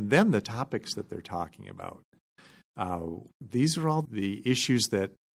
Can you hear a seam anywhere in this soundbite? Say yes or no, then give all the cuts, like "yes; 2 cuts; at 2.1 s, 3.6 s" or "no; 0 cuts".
yes; 1 cut; at 4.0 s